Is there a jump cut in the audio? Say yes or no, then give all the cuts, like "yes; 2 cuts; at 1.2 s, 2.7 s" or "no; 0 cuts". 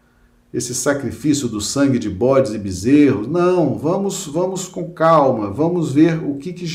no; 0 cuts